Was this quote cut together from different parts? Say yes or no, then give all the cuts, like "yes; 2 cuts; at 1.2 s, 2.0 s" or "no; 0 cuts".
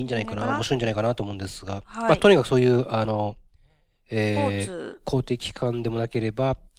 no; 0 cuts